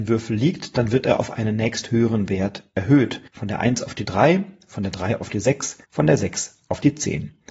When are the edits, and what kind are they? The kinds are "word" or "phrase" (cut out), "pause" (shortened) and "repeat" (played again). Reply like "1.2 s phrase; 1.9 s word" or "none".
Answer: 3.3 s pause; 5.8 s pause